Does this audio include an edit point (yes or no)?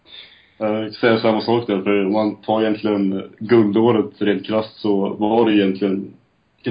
no